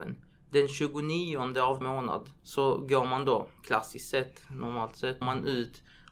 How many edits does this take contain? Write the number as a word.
four